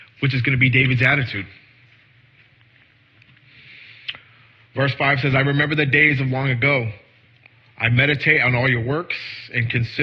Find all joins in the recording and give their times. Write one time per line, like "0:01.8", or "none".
none